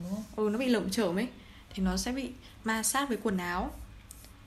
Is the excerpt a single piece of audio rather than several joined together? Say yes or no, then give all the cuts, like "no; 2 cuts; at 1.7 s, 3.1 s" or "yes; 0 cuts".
yes; 0 cuts